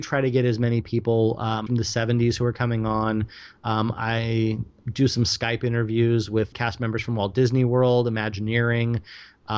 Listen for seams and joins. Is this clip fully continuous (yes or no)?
no